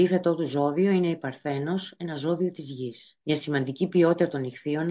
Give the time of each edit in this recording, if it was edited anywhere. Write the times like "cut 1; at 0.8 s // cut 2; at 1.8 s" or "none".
cut 1; at 3.2 s